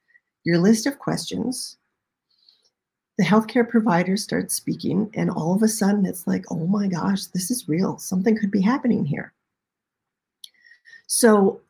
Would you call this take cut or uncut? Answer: uncut